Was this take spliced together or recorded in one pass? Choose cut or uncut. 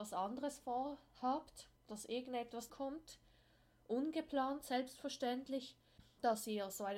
cut